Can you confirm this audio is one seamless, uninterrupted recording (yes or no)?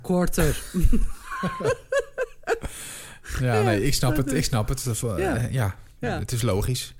no